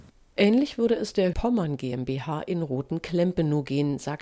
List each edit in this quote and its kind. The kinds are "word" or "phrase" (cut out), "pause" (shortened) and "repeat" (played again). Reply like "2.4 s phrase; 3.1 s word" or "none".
1.3 s word

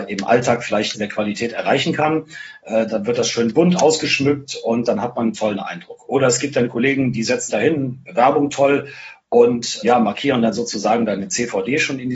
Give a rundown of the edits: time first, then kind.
0.9 s word; 7.5 s word

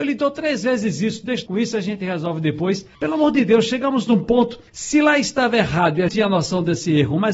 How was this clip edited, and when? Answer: 1.5 s word; 2.9 s pause; 4.7 s pause; 6.1 s phrase

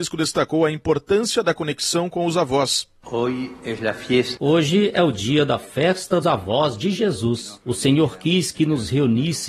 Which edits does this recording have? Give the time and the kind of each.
6.2 s word

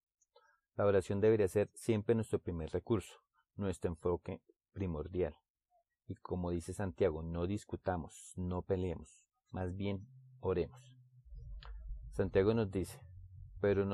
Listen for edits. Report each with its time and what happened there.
none

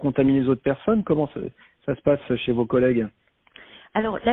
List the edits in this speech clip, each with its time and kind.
none

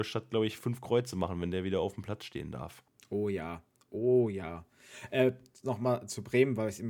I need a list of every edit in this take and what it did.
5.6 s word

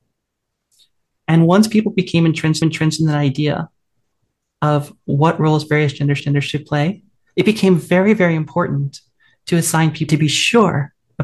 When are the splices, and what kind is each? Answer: 2.6 s repeat; 6.2 s repeat; 10.1 s phrase

